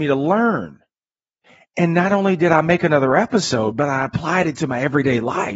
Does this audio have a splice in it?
yes; 1 cut; at 1.4 s

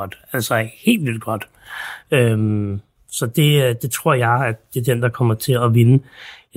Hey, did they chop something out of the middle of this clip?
no; 0 cuts

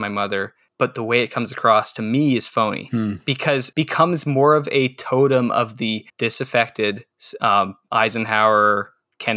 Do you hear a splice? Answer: yes; 2 cuts; at 3.7 s, 6.1 s

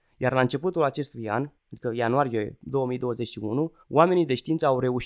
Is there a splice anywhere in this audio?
yes; 2 cuts; at 1.6 s, 3.8 s

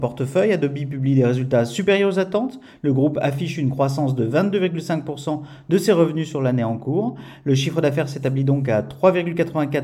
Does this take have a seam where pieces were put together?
no; 0 cuts

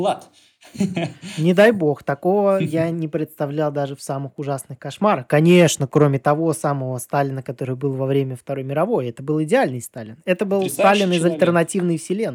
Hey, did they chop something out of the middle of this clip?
no; 0 cuts

